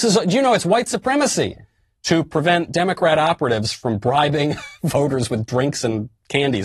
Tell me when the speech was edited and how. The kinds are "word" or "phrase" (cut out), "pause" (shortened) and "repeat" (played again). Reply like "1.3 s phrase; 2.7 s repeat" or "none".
none